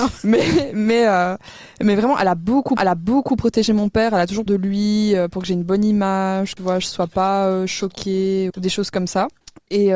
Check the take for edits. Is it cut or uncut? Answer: cut